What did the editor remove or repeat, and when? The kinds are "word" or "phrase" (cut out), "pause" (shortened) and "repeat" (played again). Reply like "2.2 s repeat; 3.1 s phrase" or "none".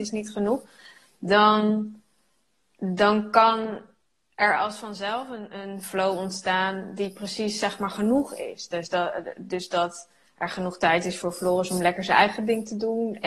none